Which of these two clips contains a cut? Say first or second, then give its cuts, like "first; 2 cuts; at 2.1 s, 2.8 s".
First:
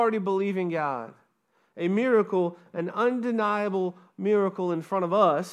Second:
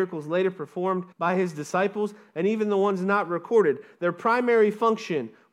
second; 1 cut; at 1.1 s